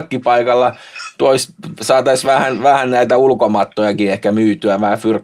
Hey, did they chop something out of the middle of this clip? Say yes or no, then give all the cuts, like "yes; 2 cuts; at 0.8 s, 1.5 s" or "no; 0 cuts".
no; 0 cuts